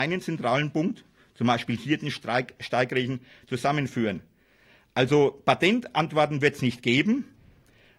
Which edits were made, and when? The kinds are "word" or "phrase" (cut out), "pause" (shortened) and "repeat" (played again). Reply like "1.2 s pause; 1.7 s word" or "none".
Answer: none

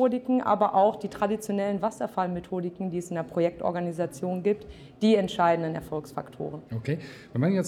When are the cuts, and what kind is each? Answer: 6.7 s pause

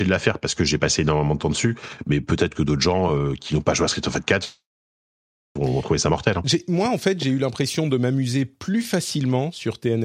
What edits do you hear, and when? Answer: none

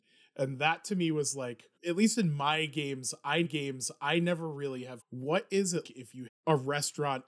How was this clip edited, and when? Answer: 1.7 s pause; 3.4 s repeat; 5.0 s phrase; 5.8 s word; 6.3 s word

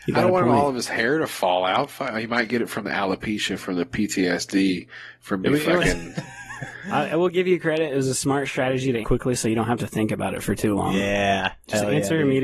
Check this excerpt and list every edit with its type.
9.0 s word

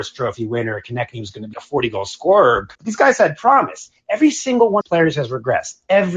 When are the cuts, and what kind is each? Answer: 1.5 s word; 2.7 s pause; 4.8 s phrase

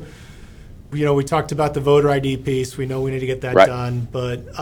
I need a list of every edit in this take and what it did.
0.9 s phrase

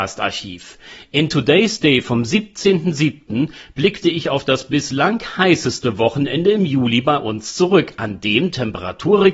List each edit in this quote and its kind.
none

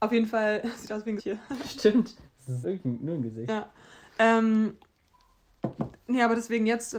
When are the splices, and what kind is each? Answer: 1.2 s word; 2.6 s word

